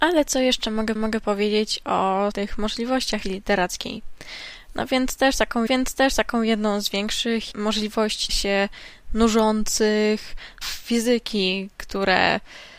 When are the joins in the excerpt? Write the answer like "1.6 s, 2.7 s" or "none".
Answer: 1.0 s, 2.3 s, 3.2 s, 5.7 s, 7.5 s, 8.3 s, 10.6 s